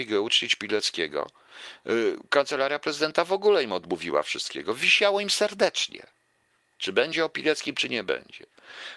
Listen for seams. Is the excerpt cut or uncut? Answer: uncut